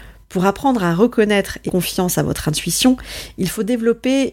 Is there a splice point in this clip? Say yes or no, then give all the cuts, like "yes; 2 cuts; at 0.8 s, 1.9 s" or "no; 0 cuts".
yes; 1 cut; at 1.7 s